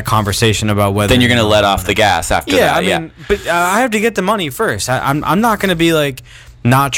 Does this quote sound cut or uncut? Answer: uncut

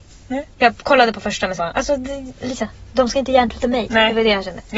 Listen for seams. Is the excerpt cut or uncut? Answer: cut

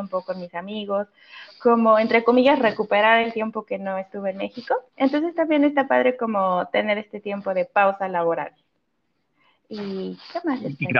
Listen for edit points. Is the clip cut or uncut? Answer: cut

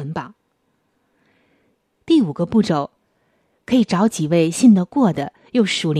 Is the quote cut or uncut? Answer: uncut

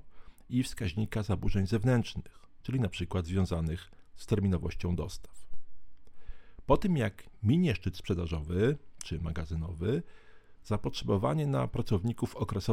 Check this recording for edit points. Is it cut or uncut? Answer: uncut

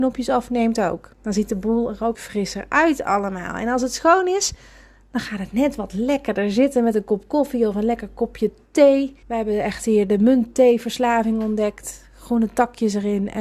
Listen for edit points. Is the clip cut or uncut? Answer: cut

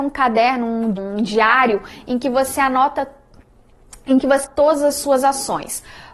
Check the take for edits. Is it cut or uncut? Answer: cut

